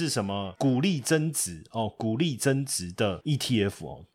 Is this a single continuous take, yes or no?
yes